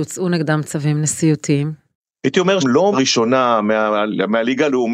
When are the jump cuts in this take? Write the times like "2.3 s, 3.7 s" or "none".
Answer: 2.6 s, 2.9 s